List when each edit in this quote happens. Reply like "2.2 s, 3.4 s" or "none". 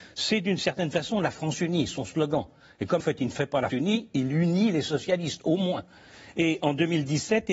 3.0 s, 3.7 s